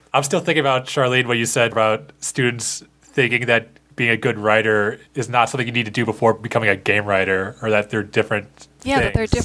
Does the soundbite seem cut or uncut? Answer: cut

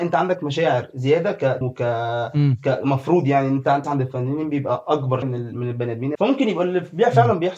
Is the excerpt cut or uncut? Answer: cut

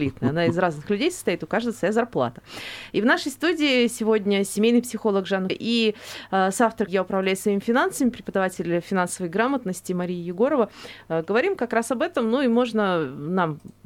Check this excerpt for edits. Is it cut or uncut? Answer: cut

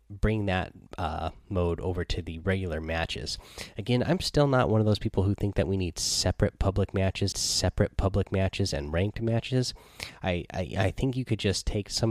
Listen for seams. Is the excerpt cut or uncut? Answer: cut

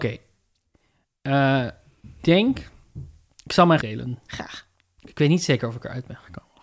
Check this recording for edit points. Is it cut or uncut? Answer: cut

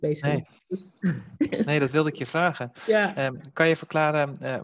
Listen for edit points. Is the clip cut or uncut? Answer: uncut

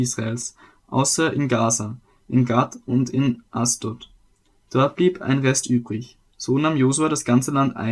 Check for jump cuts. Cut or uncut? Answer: uncut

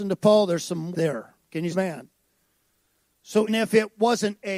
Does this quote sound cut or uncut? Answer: cut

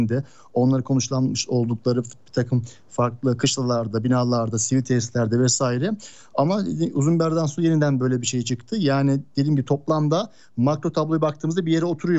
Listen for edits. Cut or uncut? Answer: uncut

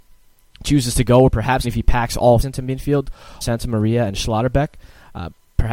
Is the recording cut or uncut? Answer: cut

